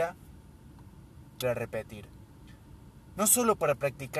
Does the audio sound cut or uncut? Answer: cut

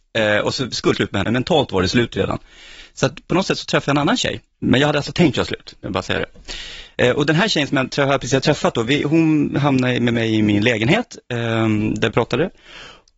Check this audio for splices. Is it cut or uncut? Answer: cut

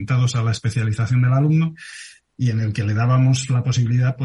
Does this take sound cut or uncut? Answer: uncut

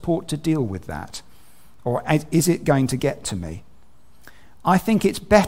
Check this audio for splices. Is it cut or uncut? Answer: uncut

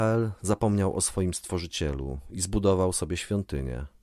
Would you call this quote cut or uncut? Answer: uncut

